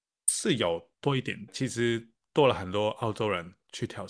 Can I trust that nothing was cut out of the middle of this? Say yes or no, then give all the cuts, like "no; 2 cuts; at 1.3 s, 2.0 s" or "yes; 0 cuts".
no; 1 cut; at 1.5 s